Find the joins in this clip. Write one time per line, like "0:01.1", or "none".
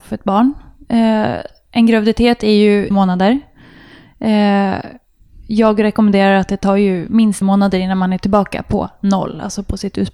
0:02.9
0:07.4

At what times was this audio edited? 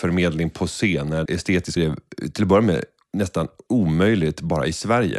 0:01.3
0:01.8

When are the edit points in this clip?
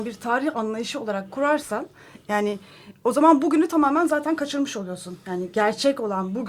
none

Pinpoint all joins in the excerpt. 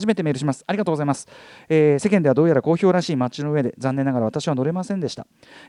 none

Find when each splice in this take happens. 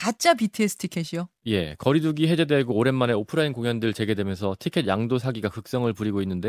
0:01.4

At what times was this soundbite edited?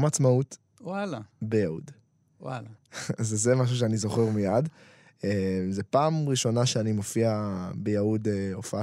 0:02.8

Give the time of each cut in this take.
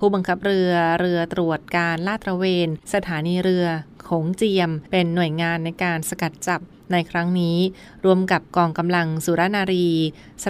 0:02.8
0:04.9

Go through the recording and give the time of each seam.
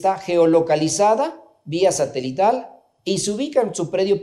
none

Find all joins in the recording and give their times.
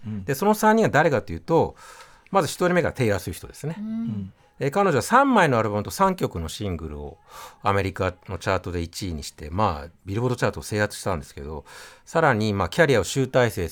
none

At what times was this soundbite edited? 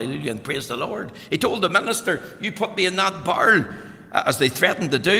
none

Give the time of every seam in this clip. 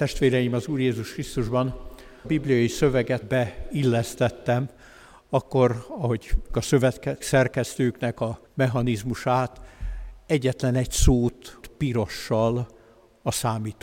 0:02.2
0:03.2
0:06.5
0:07.2
0:08.5
0:11.6

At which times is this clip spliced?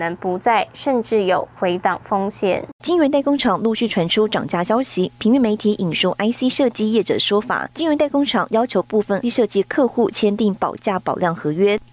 0:02.8
0:09.2

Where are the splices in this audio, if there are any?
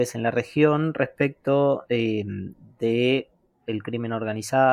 none

